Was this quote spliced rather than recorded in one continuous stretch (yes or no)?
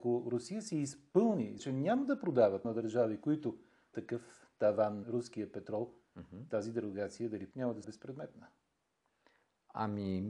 yes